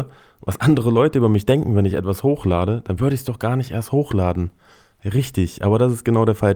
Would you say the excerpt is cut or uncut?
uncut